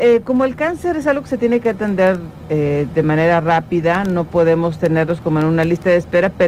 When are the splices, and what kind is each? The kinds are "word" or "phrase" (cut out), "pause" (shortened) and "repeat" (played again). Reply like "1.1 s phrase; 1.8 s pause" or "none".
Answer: none